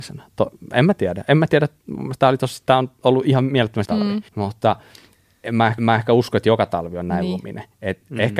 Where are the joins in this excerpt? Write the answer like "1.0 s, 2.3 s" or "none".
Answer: 3.8 s, 4.3 s, 5.8 s

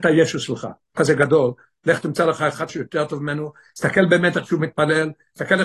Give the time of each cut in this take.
1.0 s, 2.7 s

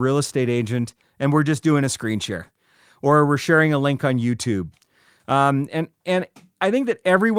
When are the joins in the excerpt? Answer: none

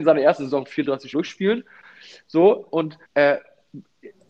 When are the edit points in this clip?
1.1 s, 3.0 s

